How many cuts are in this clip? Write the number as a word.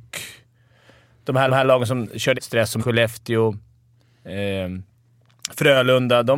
three